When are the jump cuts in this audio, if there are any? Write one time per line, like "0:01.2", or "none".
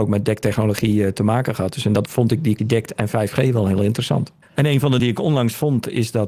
0:02.0
0:02.6
0:05.0